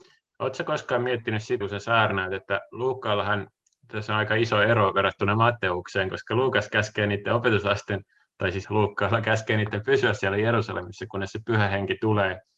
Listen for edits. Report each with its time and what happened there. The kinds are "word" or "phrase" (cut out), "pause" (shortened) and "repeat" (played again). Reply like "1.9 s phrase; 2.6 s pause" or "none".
1.6 s word; 8.6 s word